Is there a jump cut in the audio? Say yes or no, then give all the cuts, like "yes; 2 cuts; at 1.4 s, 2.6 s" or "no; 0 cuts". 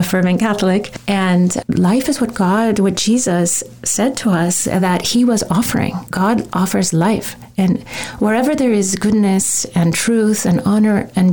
no; 0 cuts